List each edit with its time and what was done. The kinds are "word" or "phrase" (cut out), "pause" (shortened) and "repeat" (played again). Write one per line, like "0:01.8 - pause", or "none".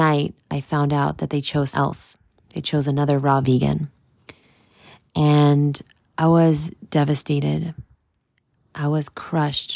0:01.7 - word